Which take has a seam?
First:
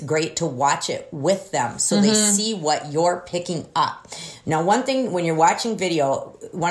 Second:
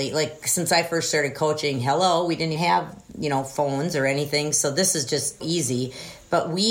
second; 2 cuts; at 2.6 s, 5.4 s

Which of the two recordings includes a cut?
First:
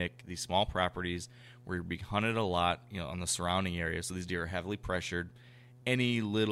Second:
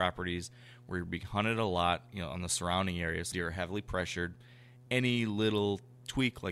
second; 1 cut; at 3.3 s

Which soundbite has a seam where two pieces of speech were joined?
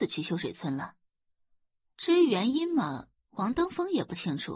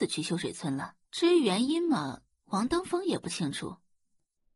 second; 1 cut; at 1.0 s

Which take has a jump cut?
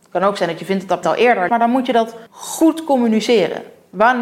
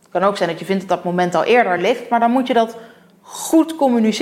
first; 3 cuts; at 1.0 s, 1.5 s, 2.3 s

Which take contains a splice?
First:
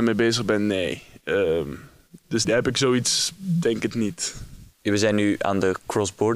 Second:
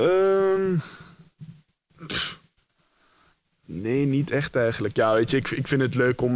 first; 2 cuts; at 2.4 s, 4.7 s

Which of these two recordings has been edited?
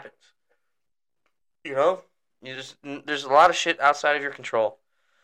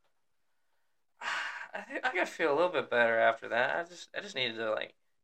second; 1 cut; at 2.1 s

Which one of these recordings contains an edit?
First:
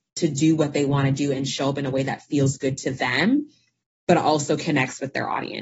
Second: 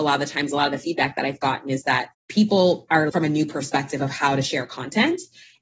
second; 2 cuts; at 2.1 s, 3.1 s

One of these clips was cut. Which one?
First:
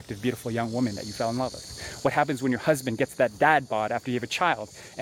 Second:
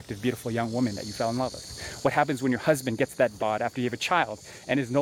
second; 1 cut; at 3.4 s

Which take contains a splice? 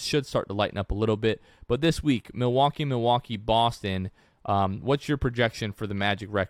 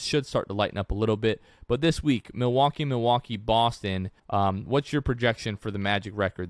second; 1 cut; at 4.2 s

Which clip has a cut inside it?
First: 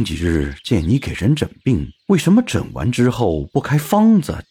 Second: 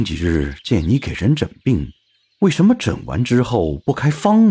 first; 1 cut; at 1.9 s

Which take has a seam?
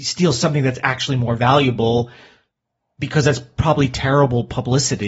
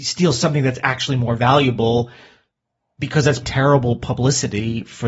second; 1 cut; at 3.4 s

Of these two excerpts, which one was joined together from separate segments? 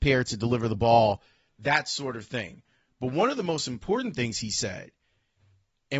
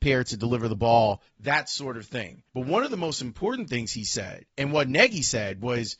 second; 3 cuts; at 1.3 s, 2.5 s, 4.5 s

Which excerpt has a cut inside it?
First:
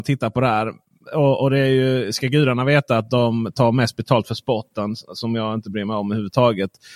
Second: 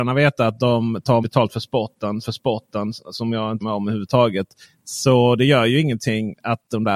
second; 4 cuts; at 1.2 s, 2.2 s, 3.6 s, 4.6 s

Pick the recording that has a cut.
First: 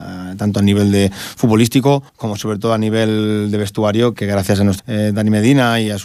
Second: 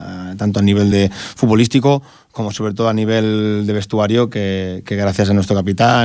first; 3 cuts; at 2.1 s, 4.1 s, 4.8 s

